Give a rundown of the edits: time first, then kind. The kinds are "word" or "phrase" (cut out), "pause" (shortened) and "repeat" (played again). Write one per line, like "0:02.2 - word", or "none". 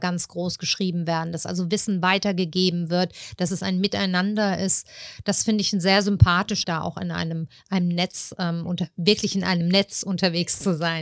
0:06.6 - word